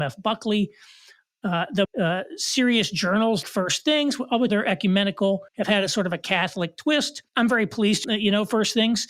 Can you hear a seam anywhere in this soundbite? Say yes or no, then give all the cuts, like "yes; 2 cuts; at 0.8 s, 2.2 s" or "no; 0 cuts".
yes; 6 cuts; at 1.8 s, 3.4 s, 4.5 s, 5.5 s, 7.3 s, 8.0 s